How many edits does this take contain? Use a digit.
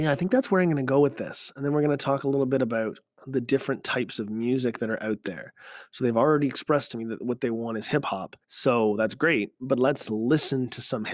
1